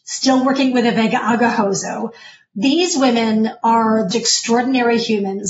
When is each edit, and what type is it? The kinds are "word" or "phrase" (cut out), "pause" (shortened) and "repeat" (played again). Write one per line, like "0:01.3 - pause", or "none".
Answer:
0:04.1 - word